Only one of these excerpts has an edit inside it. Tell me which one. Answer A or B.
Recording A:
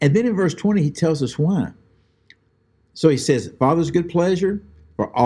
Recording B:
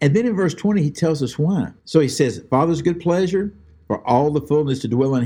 B